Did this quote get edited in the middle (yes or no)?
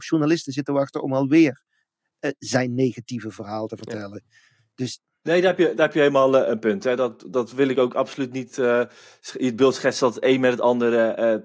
no